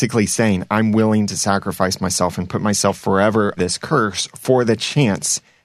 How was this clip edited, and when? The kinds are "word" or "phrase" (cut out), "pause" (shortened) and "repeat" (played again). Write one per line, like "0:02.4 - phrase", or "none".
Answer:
0:03.6 - word